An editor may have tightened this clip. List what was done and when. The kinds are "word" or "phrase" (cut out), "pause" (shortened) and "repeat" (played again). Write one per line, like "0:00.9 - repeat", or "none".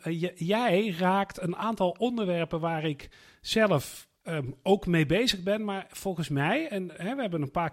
none